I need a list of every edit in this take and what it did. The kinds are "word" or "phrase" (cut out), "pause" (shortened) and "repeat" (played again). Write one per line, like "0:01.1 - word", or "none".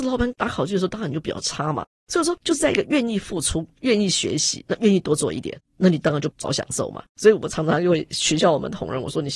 0:07.1 - pause